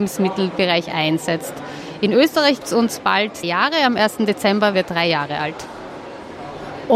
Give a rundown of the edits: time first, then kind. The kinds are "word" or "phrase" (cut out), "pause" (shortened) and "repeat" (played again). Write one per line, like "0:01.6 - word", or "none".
0:02.6 - word
0:03.4 - word
0:04.7 - word